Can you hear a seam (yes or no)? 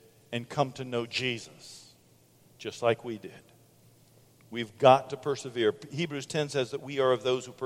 no